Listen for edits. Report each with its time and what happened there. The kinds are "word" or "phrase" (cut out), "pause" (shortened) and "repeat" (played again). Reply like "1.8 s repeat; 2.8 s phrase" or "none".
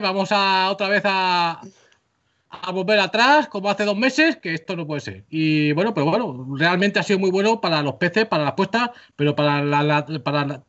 5.3 s pause